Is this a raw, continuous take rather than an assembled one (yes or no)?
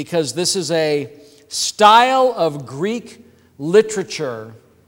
yes